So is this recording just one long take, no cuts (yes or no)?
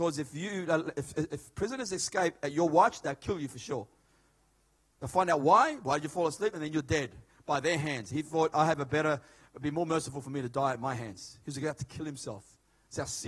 yes